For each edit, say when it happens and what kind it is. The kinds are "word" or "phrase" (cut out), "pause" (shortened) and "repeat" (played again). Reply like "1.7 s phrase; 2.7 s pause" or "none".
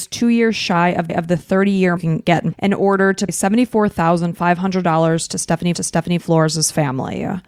1.1 s repeat; 2.0 s phrase; 2.5 s word; 3.3 s word; 5.7 s repeat

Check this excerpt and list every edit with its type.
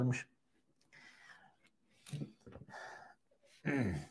none

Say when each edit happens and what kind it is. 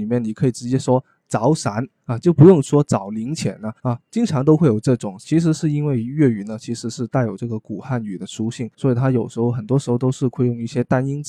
3.8 s pause; 8.7 s pause

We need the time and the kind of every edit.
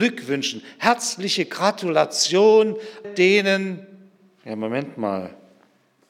3.0 s word

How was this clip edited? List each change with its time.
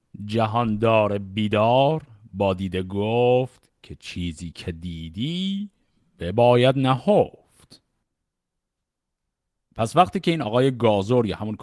none

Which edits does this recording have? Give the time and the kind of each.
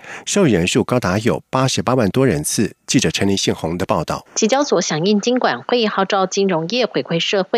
4.3 s pause

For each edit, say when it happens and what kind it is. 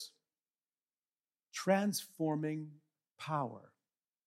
none

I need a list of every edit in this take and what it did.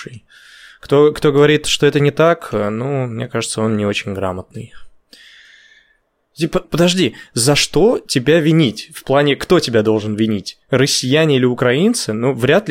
6.6 s word

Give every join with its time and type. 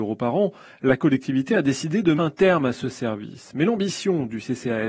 2.2 s word

